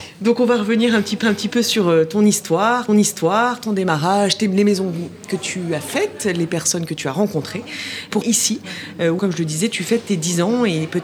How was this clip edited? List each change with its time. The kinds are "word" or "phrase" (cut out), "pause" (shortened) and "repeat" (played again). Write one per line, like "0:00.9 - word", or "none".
0:01.2 - repeat
0:02.9 - repeat
0:08.2 - word
0:09.2 - word